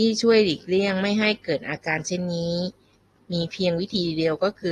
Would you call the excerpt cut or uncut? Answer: uncut